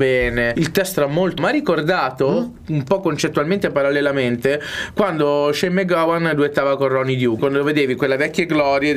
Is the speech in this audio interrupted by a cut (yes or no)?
yes